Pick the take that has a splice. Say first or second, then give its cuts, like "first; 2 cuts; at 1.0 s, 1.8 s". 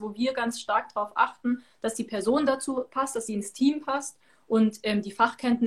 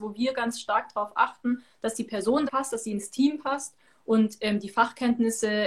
second; 1 cut; at 2.5 s